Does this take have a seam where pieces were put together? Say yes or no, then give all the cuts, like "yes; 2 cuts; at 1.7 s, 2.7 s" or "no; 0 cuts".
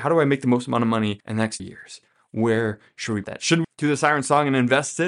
yes; 4 cuts; at 1.2 s, 1.6 s, 3.2 s, 3.6 s